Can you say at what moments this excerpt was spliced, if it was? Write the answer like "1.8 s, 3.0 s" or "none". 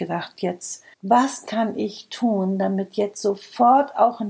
0.9 s